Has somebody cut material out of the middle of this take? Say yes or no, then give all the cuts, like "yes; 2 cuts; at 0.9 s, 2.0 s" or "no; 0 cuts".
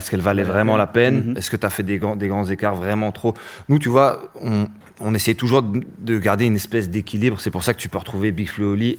yes; 1 cut; at 4.8 s